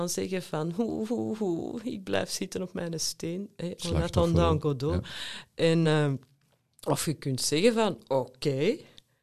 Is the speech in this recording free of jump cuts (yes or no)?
yes